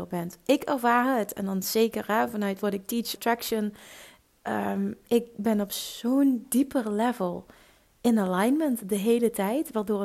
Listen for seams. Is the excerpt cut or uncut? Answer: cut